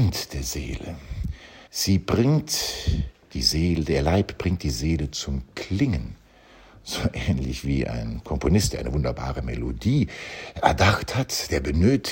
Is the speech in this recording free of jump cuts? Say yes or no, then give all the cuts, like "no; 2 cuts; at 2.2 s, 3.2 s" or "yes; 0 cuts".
no; 1 cut; at 1.7 s